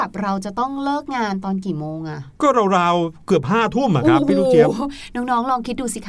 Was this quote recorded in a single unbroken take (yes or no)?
no